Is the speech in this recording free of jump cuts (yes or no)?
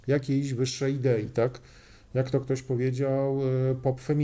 yes